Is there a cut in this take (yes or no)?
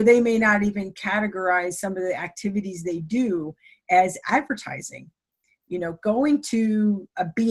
no